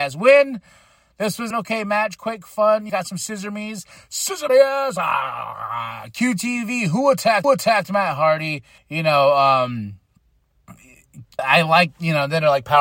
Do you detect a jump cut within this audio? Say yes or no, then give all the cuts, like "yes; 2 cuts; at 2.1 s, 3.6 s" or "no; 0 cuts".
yes; 6 cuts; at 1.5 s, 2.9 s, 4.5 s, 7.4 s, 8.8 s, 11.4 s